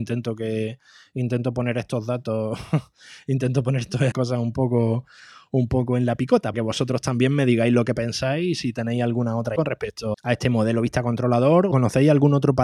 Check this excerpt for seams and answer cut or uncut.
cut